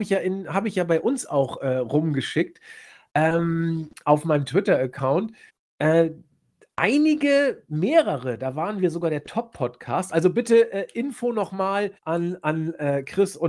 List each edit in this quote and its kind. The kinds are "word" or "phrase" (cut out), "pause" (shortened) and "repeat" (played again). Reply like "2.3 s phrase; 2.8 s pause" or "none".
5.5 s pause; 12.0 s pause